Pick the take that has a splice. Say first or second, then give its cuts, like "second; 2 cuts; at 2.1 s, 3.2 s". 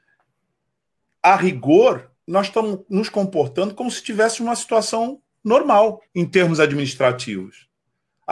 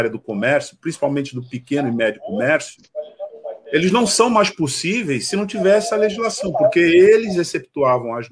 first; 2 cuts; at 2.2 s, 6.1 s